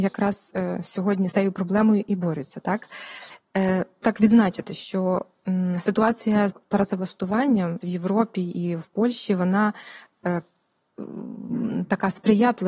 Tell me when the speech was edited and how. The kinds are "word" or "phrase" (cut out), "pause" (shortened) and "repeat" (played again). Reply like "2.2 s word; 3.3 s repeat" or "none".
1.3 s word; 4.0 s word; 6.5 s word; 7.8 s word